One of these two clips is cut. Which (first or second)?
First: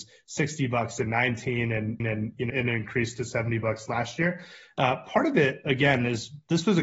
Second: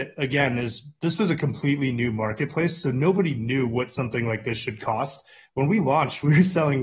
first